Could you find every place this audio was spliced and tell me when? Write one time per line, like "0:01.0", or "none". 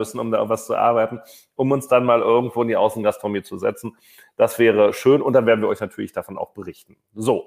none